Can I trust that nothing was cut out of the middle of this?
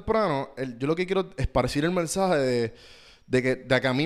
yes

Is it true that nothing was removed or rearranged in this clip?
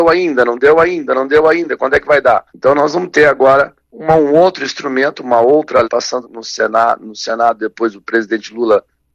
no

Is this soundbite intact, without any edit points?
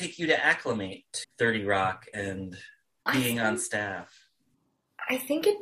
no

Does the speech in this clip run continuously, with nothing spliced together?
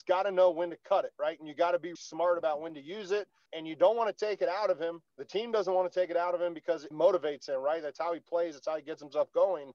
no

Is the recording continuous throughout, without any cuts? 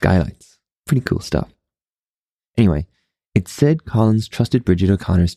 yes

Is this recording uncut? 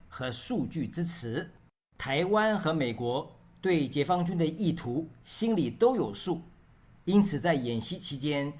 yes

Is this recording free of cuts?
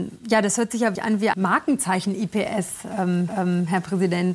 no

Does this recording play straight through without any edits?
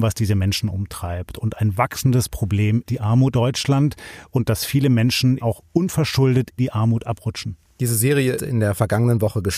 no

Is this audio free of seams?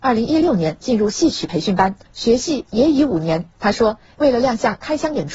no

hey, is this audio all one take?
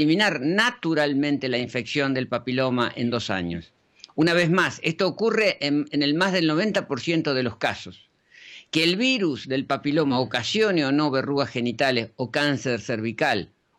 yes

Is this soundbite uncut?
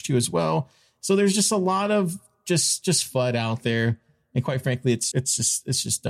no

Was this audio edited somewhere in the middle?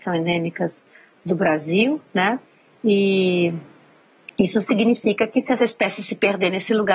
no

